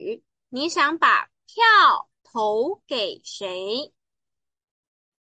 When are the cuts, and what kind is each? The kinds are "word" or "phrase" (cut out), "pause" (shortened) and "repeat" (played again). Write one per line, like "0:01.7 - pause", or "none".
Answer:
0:02.2 - pause